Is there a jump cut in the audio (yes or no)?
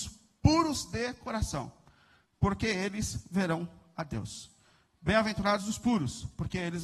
no